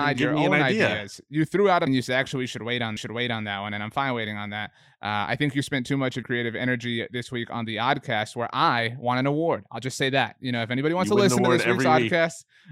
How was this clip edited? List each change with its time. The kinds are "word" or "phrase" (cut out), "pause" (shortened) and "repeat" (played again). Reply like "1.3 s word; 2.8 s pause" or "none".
1.9 s word; 3.0 s repeat; 6.2 s word